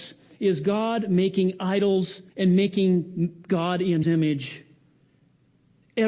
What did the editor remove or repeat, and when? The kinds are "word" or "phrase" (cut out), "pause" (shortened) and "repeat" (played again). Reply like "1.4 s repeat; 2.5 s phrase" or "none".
2.3 s pause; 4.0 s word